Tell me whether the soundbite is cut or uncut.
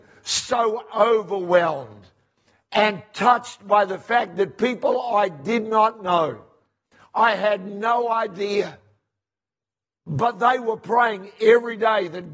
uncut